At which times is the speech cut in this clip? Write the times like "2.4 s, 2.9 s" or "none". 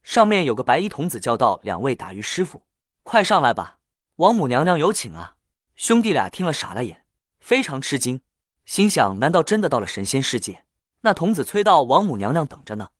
none

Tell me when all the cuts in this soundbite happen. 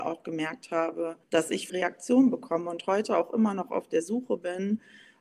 1.2 s, 1.7 s

